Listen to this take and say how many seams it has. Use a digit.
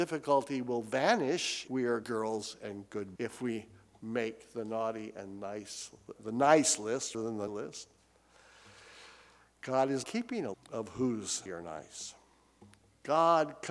9